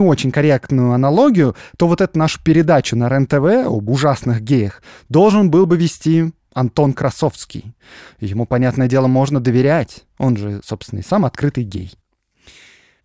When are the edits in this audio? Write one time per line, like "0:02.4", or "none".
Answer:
none